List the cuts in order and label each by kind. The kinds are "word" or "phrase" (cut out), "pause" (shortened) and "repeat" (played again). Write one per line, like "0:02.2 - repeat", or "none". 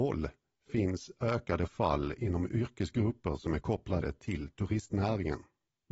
none